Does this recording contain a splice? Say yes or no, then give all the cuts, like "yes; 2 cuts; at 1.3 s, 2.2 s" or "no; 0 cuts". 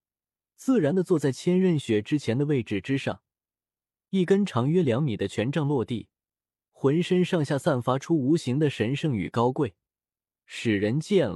no; 0 cuts